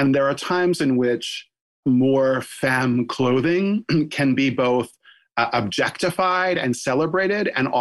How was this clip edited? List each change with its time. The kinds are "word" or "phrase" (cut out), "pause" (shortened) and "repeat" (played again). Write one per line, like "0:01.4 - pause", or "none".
none